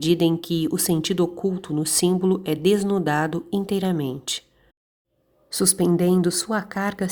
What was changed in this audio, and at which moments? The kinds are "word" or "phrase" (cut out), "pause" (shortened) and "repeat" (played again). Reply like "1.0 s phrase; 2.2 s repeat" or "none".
none

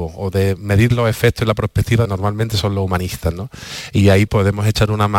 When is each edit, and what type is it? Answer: 2.0 s phrase; 4.3 s word

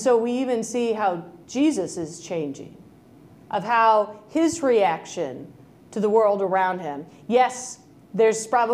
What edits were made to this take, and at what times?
none

